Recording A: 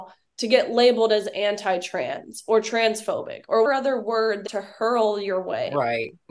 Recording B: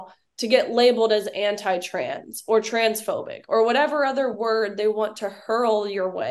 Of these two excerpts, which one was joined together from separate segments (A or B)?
A